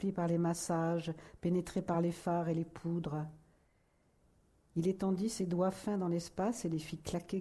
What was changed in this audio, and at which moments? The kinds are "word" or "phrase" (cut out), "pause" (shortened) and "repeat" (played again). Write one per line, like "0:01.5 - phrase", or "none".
none